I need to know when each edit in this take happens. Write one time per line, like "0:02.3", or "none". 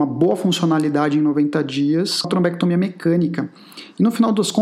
0:02.2